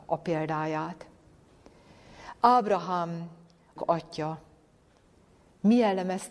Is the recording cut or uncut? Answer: cut